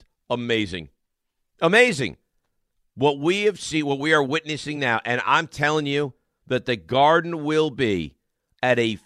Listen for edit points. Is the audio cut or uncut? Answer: uncut